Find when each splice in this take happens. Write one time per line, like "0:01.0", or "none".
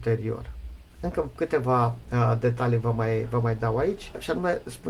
0:00.9